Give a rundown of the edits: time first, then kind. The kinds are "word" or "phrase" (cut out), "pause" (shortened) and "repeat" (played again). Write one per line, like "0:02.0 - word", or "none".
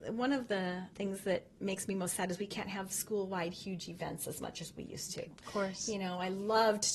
0:00.9 - word